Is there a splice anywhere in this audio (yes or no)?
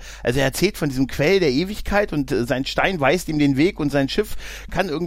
no